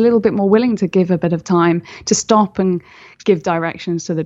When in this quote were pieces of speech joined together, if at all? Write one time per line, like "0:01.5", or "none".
none